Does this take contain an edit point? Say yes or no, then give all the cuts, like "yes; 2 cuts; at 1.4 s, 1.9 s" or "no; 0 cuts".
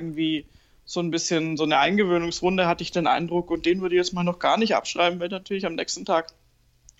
no; 0 cuts